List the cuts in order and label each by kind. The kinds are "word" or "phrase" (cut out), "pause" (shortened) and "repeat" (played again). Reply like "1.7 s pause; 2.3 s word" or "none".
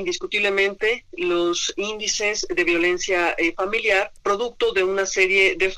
4.2 s pause